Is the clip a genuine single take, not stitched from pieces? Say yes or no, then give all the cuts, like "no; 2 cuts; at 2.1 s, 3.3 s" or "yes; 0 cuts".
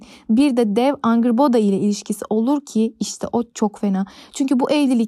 yes; 0 cuts